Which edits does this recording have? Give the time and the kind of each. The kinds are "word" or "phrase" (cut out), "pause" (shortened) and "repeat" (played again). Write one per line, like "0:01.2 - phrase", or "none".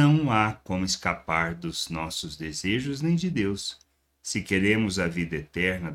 none